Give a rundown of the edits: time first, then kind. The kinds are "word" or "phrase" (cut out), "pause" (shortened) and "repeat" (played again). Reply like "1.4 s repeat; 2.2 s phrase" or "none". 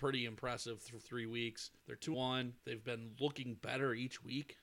1.0 s word; 1.8 s pause; 2.1 s word; 2.6 s pause